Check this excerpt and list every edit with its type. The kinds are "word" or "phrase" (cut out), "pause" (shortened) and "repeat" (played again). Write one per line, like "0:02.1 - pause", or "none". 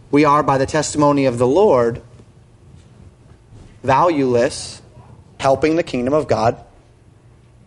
0:05.4 - word